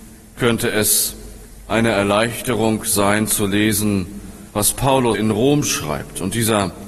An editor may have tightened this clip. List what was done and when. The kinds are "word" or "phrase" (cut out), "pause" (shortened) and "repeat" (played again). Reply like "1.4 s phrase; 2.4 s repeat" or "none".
4.5 s pause; 5.1 s phrase